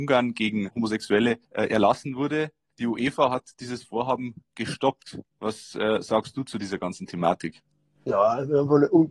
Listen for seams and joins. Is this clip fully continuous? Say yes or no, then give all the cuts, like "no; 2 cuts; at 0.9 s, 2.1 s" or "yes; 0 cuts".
yes; 0 cuts